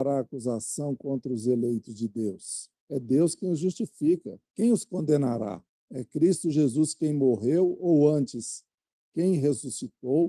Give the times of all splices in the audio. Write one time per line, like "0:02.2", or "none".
0:02.8
0:04.5
0:05.7